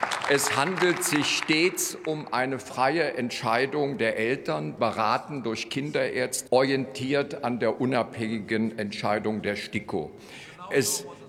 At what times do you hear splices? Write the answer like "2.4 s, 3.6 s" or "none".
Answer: 6.5 s

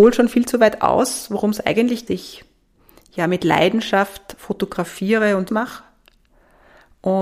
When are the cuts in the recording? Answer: 2.1 s, 5.5 s

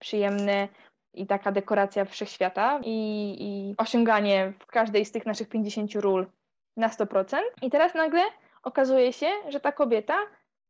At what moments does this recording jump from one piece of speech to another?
7.5 s

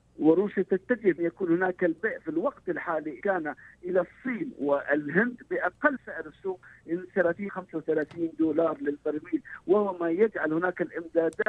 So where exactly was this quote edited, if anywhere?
1.2 s, 3.2 s, 6.0 s, 7.5 s

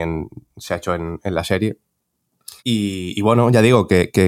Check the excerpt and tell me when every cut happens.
2.6 s

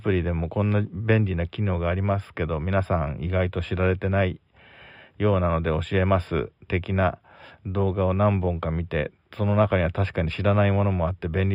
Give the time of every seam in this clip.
6.6 s

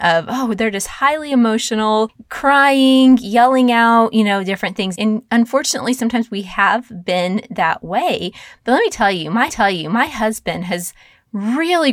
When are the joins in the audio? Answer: 4.9 s, 9.5 s

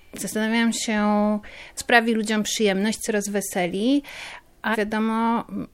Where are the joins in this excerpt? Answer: 1.8 s, 3.1 s, 4.7 s

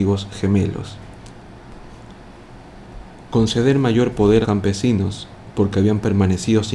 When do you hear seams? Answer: 4.4 s

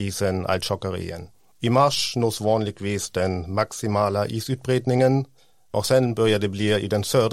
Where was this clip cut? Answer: 1.3 s

